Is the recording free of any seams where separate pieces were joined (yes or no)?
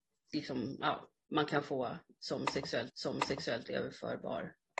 no